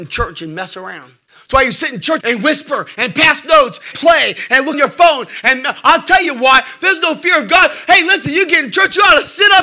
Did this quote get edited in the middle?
yes; 4 cuts; at 1.3 s, 2.2 s, 3.9 s, 4.7 s

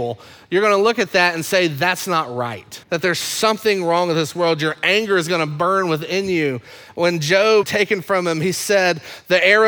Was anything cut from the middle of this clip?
yes; 2 cuts; at 2.8 s, 7.6 s

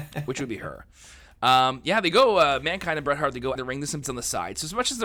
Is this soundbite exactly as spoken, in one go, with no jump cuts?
no; 2 cuts; at 3.6 s, 4.0 s

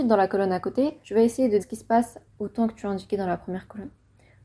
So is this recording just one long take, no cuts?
no; 3 cuts; at 1.0 s, 1.6 s, 2.3 s

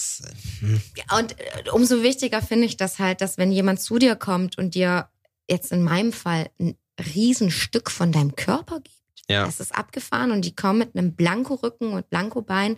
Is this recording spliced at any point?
no; 0 cuts

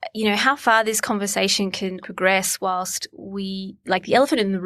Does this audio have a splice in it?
yes; 1 cut; at 2.0 s

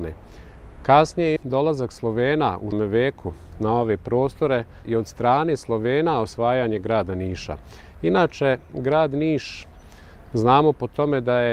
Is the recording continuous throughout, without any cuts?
no; 3 cuts; at 1.4 s, 2.7 s, 4.8 s

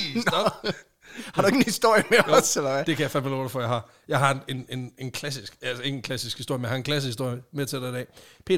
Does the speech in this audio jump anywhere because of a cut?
no; 0 cuts

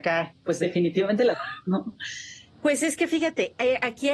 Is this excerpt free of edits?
no; 1 cut; at 1.3 s

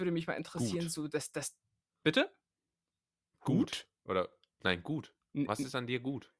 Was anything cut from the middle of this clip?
no; 0 cuts

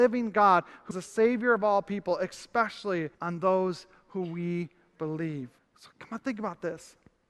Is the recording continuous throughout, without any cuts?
no; 3 cuts; at 0.9 s, 3.1 s, 5.6 s

